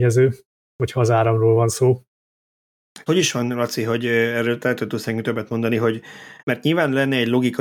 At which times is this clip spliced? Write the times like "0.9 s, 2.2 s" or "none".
3.1 s, 6.4 s